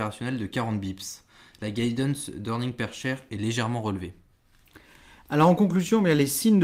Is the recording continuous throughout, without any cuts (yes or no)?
yes